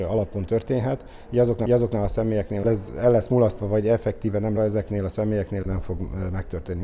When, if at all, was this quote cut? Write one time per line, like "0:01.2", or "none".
0:01.7
0:02.6
0:04.6
0:05.6